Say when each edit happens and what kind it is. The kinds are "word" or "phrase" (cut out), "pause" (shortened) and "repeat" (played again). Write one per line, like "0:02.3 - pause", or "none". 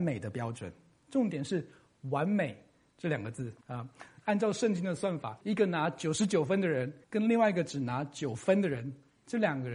0:03.6 - pause
0:05.4 - pause
0:07.0 - pause